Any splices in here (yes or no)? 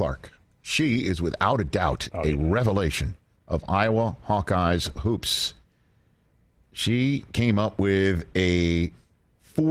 yes